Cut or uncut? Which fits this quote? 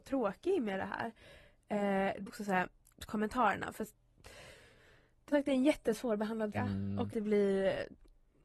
cut